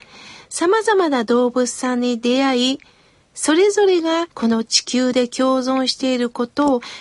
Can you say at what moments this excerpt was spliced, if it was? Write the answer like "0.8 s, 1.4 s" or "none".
4.3 s